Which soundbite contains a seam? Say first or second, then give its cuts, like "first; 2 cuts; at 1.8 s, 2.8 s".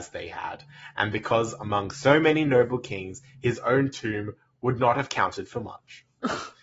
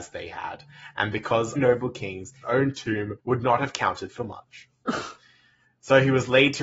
second; 3 cuts; at 1.6 s, 2.4 s, 3.2 s